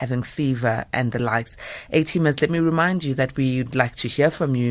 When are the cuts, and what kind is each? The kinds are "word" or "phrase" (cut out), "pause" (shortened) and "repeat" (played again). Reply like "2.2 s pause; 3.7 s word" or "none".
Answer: none